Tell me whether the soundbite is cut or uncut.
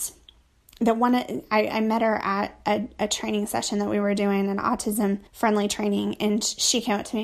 cut